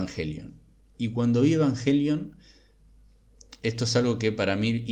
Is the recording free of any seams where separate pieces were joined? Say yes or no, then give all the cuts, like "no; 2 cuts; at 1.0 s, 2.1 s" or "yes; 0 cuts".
yes; 0 cuts